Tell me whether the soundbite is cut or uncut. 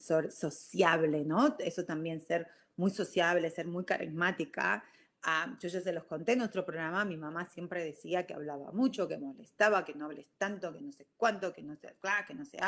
uncut